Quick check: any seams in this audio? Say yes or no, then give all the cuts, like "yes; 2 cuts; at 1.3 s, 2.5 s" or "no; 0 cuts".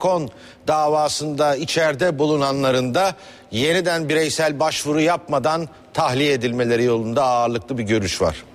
no; 0 cuts